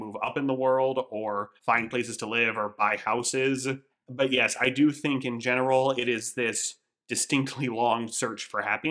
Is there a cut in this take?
yes; 2 cuts; at 1.6 s, 3.9 s

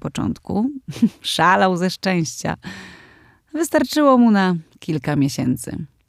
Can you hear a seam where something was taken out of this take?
no; 0 cuts

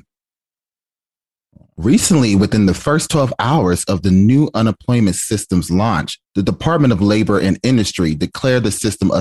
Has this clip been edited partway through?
yes; 1 cut; at 6.2 s

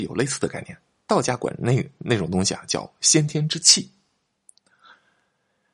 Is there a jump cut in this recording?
no; 0 cuts

